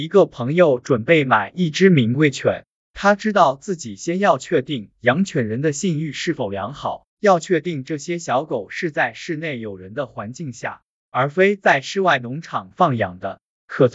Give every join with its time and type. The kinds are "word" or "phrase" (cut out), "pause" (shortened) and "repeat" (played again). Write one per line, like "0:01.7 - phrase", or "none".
0:04.9 - pause
0:07.1 - pause